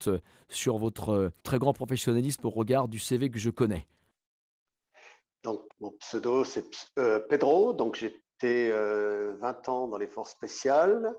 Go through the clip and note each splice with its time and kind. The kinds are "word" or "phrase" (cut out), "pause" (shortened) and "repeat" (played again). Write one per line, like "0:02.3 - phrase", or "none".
0:01.4 - pause
0:05.7 - word

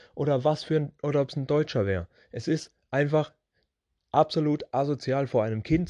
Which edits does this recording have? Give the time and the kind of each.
none

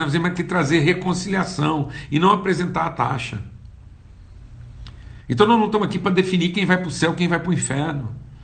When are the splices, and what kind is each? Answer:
none

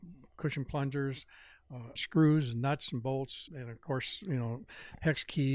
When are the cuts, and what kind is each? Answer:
0:02.0 - phrase
0:03.5 - word

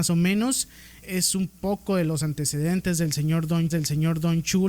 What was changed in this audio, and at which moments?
0:01.0 - word
0:03.7 - repeat

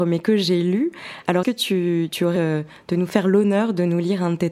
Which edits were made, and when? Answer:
0:01.4 - word
0:02.4 - word

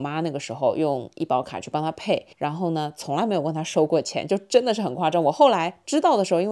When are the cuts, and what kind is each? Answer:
0:02.3 - pause

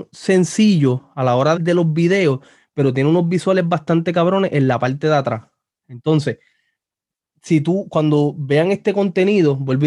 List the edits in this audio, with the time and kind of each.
0:01.6 - word

